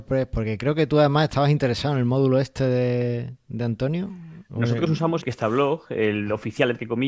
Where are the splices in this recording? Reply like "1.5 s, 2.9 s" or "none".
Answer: 5.2 s